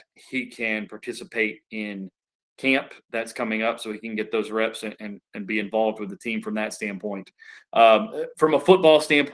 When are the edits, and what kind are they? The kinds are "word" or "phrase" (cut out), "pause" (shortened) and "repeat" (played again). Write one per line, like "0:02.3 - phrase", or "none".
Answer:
none